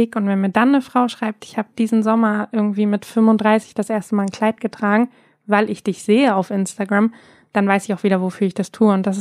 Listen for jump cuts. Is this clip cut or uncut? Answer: uncut